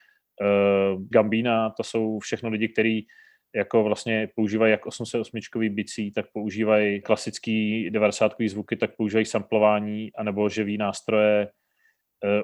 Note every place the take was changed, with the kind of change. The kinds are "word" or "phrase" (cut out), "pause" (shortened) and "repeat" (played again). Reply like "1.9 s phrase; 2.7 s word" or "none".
1.1 s word; 7.0 s word